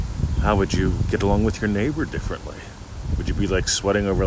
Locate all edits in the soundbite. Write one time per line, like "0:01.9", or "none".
none